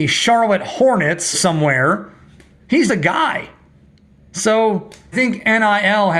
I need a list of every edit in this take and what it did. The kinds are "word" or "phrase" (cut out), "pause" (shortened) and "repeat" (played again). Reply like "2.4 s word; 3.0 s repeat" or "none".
1.3 s word; 2.9 s word; 5.1 s word